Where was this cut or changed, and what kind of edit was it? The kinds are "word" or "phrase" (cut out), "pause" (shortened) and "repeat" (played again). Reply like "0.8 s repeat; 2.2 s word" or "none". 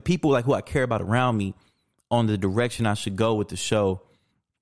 none